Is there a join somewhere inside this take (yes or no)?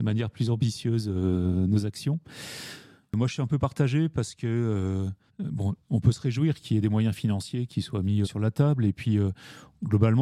yes